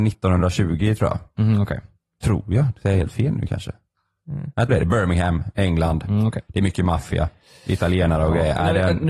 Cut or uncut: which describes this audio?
cut